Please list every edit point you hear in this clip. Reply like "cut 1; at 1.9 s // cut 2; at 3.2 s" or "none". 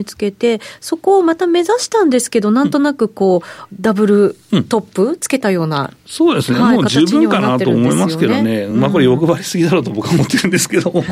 none